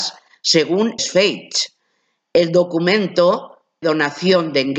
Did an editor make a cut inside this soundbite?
yes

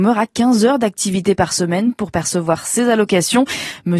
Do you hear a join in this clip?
no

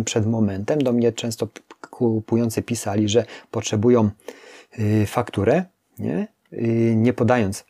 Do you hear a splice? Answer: no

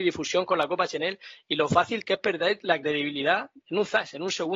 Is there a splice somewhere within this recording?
no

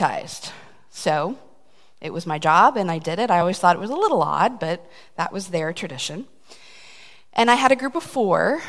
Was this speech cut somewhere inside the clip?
no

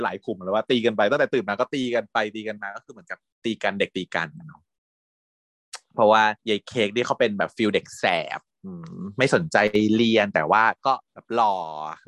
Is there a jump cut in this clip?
yes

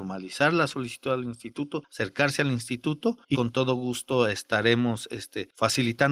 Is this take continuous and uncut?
no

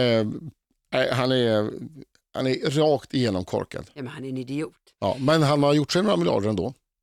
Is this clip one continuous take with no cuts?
yes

